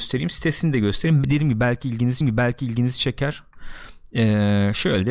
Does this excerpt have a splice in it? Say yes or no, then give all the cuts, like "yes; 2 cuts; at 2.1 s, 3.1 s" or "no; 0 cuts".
yes; 1 cut; at 2.2 s